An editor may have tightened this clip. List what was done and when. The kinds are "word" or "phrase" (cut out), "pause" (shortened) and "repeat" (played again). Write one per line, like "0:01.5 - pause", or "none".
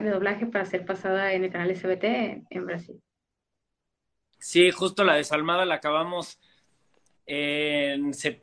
none